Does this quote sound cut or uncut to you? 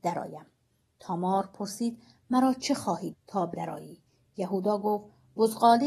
cut